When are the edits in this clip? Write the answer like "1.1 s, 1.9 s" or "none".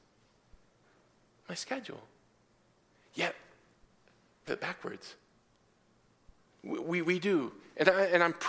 4.5 s